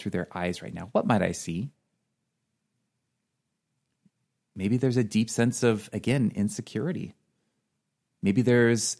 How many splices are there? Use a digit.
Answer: 0